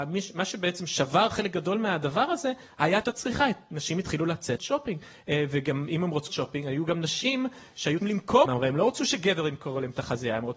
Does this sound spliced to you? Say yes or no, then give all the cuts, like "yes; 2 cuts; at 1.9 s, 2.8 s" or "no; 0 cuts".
yes; 5 cuts; at 3.0 s, 4.6 s, 6.3 s, 8.0 s, 8.5 s